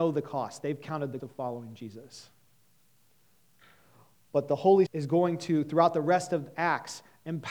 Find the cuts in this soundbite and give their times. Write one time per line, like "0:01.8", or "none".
0:01.2
0:04.9